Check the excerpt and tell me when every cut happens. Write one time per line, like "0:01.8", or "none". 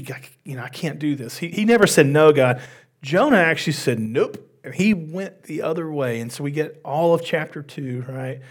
none